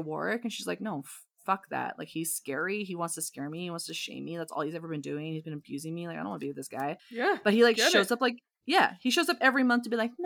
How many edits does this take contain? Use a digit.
1